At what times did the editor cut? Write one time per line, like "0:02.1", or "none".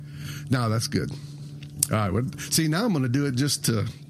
none